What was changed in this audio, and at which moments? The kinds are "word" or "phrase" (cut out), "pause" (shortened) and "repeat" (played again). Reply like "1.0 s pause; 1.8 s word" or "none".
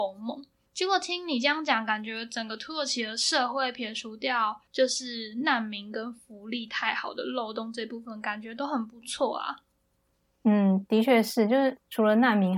10.9 s word

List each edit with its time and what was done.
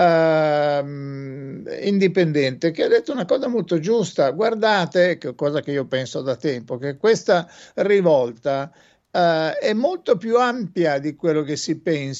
none

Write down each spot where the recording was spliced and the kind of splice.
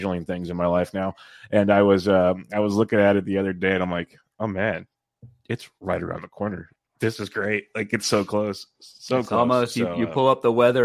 none

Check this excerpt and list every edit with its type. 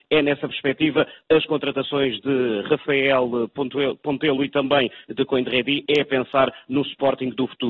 none

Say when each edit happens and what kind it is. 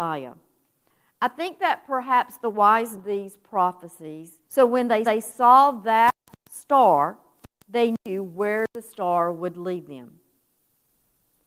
3.0 s phrase; 4.4 s pause; 5.0 s repeat; 8.0 s pause

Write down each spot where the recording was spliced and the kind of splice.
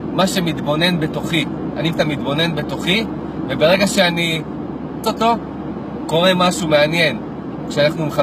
1.9 s word; 5.0 s word

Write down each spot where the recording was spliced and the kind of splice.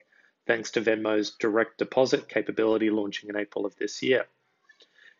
none

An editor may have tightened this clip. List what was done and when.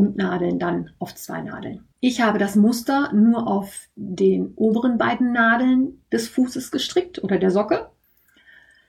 1.9 s pause

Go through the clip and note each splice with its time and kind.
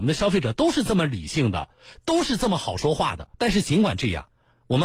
3.3 s pause

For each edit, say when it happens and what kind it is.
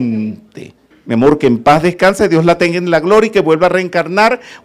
0.9 s pause

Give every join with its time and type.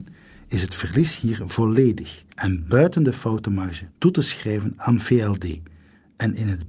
2.3 s pause; 3.9 s pause

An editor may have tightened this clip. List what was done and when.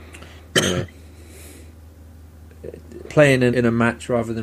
3.1 s word; 3.5 s word

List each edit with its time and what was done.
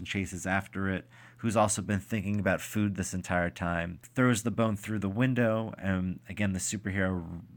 none

